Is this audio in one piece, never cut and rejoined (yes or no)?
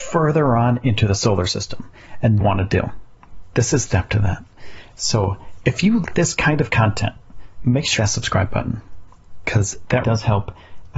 no